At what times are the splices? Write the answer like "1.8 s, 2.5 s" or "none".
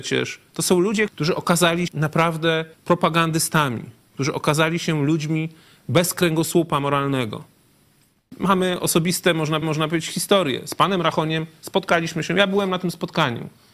1.1 s, 1.9 s, 2.7 s, 9.6 s